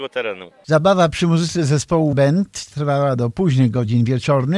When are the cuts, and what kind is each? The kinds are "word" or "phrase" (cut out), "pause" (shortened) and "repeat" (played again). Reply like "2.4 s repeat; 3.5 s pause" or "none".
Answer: 2.1 s word